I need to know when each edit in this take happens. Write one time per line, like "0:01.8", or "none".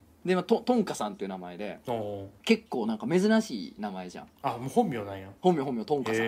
0:02.4
0:05.4